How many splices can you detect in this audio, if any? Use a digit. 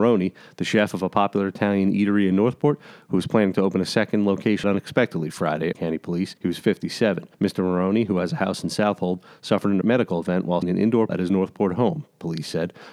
7